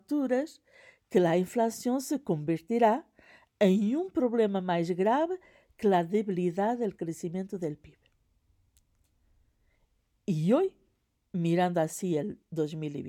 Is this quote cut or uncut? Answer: uncut